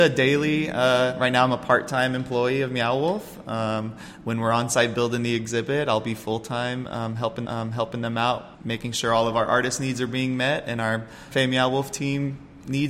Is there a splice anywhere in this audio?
yes; 3 cuts; at 7.4 s, 8.5 s, 11.3 s

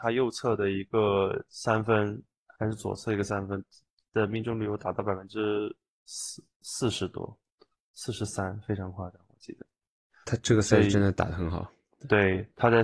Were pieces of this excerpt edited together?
no; 0 cuts

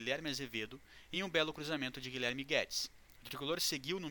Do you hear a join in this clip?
no; 0 cuts

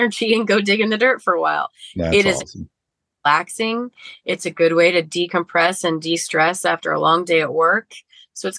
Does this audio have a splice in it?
no; 0 cuts

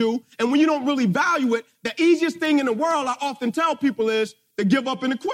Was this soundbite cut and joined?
no; 0 cuts

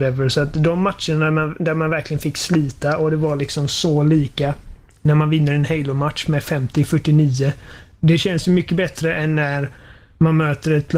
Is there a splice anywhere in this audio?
no; 0 cuts

